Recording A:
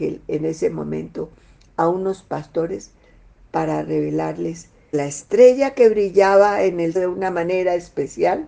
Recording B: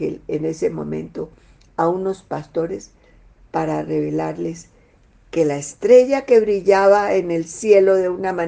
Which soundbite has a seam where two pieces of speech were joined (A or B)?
A